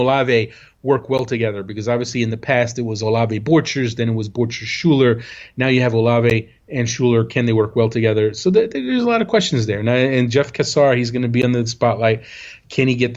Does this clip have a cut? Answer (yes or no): no